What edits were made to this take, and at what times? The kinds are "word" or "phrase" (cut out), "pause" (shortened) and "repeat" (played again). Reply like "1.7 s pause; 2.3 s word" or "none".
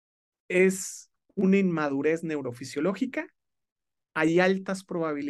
none